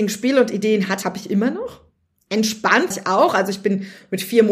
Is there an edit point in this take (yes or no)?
yes